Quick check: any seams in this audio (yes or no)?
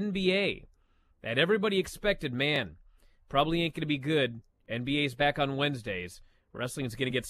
no